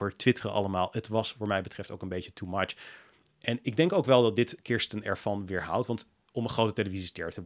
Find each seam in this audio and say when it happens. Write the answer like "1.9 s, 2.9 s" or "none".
none